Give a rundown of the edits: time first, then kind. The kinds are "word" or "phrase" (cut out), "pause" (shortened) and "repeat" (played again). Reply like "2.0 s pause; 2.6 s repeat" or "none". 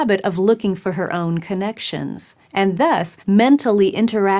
2.4 s pause; 3.2 s pause